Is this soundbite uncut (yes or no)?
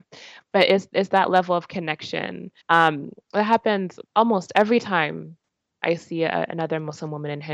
no